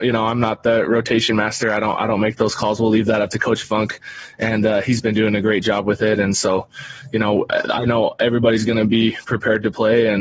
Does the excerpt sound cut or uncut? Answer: uncut